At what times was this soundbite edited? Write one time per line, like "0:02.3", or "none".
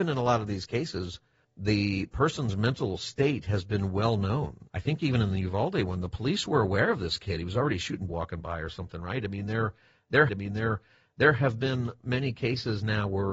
0:01.4
0:04.7
0:08.1
0:10.3

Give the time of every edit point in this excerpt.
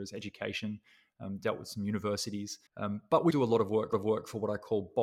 0:02.7
0:03.3
0:03.9

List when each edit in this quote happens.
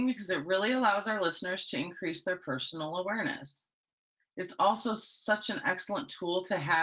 none

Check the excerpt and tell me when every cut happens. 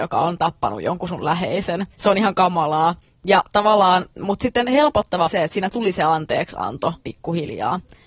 0:01.9
0:04.1
0:05.3
0:07.0

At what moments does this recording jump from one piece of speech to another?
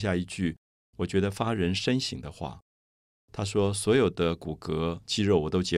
none

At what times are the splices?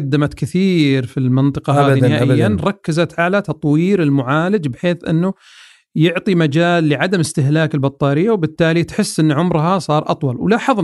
none

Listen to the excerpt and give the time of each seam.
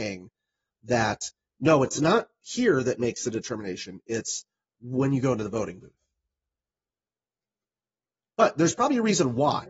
none

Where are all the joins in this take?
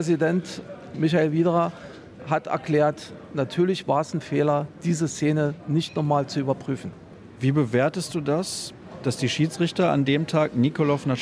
none

